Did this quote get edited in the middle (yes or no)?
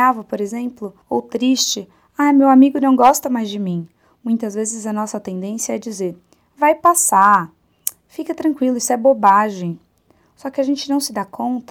yes